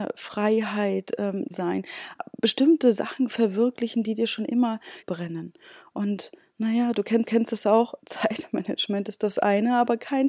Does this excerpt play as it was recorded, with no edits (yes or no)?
no